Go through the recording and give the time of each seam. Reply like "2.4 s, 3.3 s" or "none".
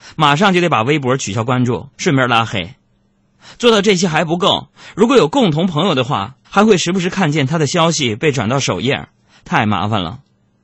1.9 s, 6.4 s